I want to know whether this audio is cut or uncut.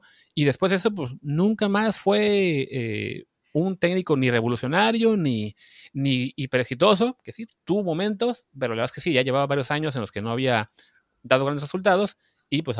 uncut